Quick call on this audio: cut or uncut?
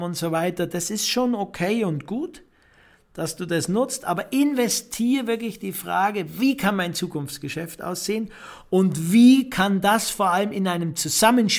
uncut